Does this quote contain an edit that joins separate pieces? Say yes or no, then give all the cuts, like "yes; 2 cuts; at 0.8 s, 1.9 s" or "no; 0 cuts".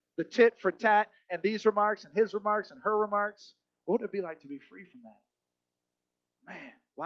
no; 0 cuts